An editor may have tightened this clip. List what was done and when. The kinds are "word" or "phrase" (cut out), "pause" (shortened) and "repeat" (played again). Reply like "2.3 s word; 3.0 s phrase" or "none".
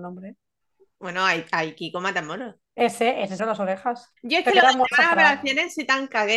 2.6 s pause; 3.4 s word; 4.2 s pause